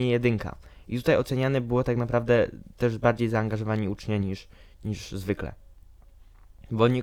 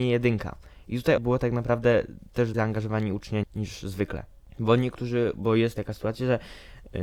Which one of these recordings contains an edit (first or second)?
second